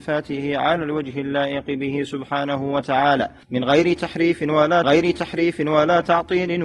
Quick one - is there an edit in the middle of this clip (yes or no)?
yes